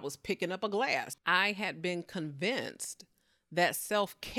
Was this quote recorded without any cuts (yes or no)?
no